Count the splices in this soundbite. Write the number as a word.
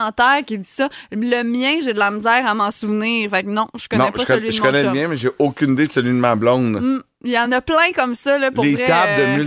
zero